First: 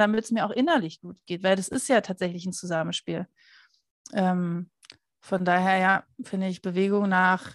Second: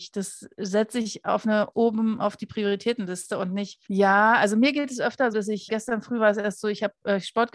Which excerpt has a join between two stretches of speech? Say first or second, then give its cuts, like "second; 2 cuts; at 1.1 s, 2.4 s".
second; 4 cuts; at 1.7 s, 3.9 s, 5.3 s, 5.7 s